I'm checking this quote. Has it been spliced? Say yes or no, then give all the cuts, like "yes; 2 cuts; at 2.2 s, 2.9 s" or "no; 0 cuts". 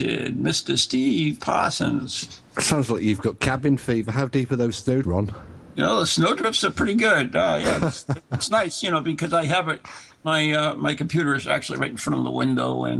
yes; 1 cut; at 5.0 s